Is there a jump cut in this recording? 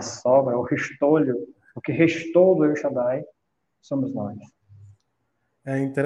no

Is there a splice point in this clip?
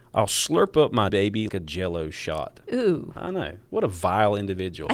yes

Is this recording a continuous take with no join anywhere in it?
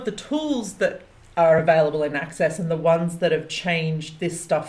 yes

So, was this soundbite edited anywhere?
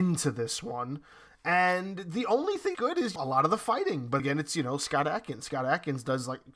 yes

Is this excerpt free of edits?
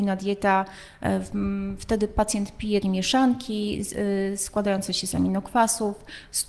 no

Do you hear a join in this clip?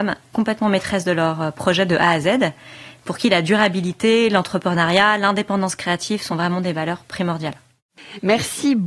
no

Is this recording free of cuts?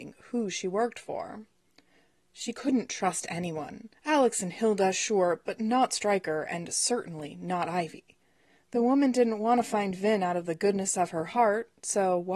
no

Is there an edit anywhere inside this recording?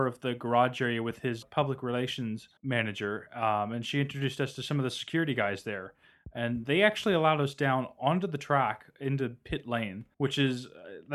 yes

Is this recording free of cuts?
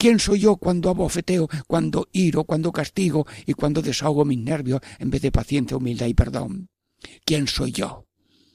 yes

